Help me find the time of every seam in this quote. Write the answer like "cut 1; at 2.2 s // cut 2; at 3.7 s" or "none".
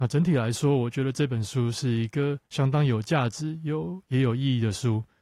cut 1; at 2.5 s